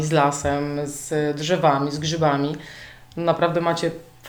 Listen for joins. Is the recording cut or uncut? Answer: uncut